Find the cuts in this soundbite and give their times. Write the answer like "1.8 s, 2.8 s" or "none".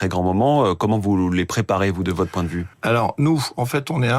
2.7 s